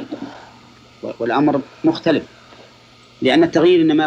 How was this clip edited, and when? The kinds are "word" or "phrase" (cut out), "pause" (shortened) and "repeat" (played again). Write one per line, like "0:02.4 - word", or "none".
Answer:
none